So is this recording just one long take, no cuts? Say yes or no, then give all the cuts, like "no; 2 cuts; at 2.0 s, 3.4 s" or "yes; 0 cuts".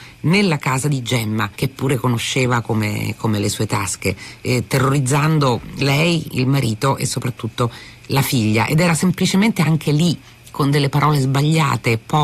no; 1 cut; at 1.5 s